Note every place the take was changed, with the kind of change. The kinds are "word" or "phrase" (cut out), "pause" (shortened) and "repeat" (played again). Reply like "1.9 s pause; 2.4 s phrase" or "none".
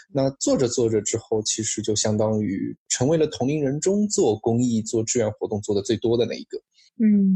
none